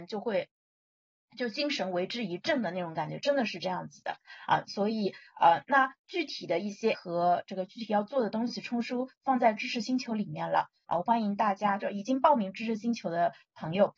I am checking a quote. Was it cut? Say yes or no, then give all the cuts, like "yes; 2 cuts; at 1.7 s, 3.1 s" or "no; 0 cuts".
yes; 1 cut; at 6.9 s